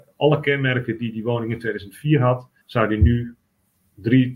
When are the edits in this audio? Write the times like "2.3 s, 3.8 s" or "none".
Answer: 2.6 s

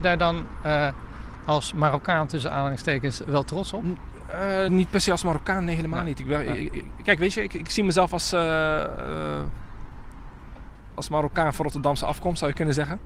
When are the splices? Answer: 4.7 s, 10.9 s

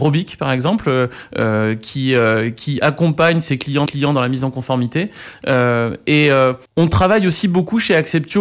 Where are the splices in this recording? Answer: 3.9 s, 6.6 s

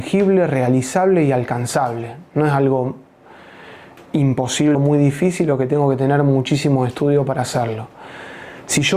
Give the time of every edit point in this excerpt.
4.7 s

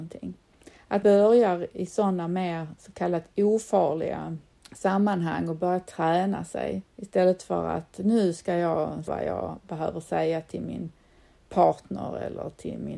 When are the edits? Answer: 1.0 s, 4.5 s, 6.9 s, 9.1 s

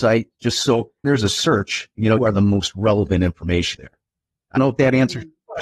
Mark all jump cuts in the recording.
1.0 s, 2.2 s, 3.7 s, 4.6 s

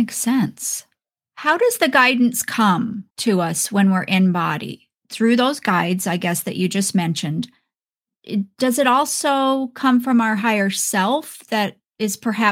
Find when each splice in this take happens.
3.1 s

